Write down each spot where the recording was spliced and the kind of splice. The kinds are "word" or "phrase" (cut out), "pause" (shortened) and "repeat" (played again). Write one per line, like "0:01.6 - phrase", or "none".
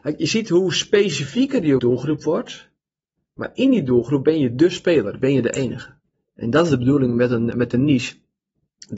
0:01.8 - phrase